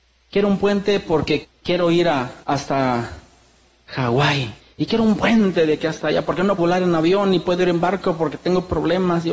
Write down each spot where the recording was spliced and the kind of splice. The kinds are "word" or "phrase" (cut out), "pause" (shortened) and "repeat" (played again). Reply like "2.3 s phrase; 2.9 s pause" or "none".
1.4 s phrase; 2.4 s pause; 4.6 s pause; 6.6 s word